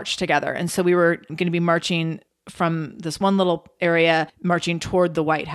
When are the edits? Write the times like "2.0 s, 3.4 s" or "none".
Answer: 4.3 s